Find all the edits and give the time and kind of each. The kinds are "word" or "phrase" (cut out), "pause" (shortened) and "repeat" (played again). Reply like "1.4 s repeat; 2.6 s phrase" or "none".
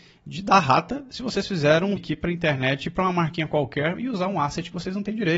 2.0 s word